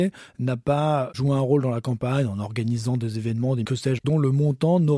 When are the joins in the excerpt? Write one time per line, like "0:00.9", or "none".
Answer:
0:01.1
0:03.6
0:04.0